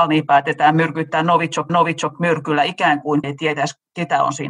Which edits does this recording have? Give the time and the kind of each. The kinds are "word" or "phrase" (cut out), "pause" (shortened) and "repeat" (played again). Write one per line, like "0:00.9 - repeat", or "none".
0:01.7 - repeat
0:03.2 - word